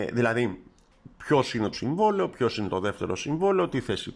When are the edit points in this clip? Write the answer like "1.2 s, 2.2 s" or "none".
1.7 s

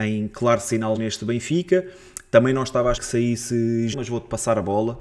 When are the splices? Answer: 0.9 s, 2.9 s, 3.9 s

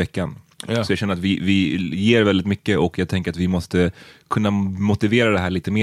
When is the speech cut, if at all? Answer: none

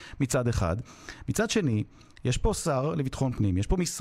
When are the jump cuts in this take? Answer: none

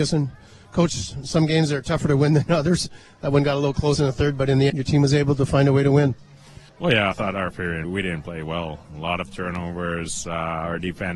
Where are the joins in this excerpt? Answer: 4.7 s, 6.7 s, 7.1 s, 7.5 s, 7.8 s

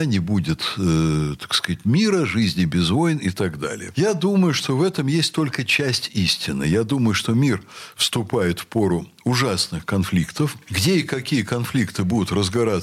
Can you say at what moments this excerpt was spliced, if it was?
none

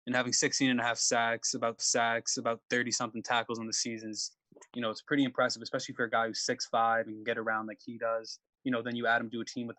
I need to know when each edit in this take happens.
1.8 s, 4.7 s, 5.0 s, 8.6 s

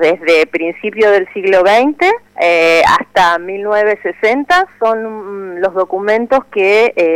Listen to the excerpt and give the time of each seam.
2.3 s

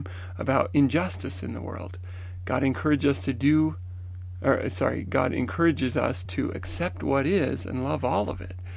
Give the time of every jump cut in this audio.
none

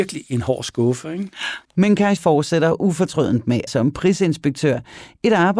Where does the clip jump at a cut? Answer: 1.6 s, 2.2 s, 3.7 s

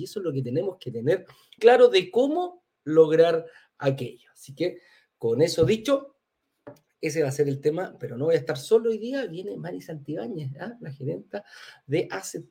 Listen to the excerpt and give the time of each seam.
1.6 s

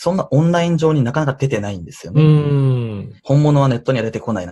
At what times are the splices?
3.2 s

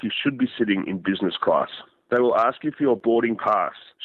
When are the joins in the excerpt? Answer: none

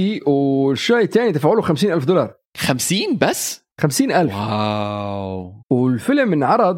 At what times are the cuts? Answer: 2.4 s, 3.7 s, 5.6 s

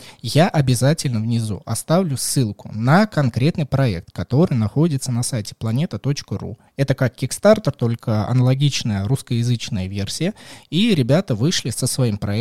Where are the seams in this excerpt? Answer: none

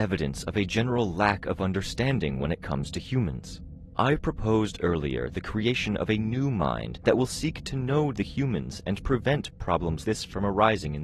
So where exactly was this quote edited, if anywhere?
10.0 s

